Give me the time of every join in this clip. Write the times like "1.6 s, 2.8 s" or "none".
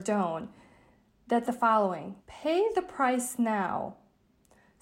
1.4 s, 2.2 s